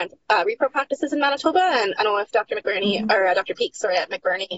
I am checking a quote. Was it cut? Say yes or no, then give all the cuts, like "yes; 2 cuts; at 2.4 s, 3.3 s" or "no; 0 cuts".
yes; 1 cut; at 2.0 s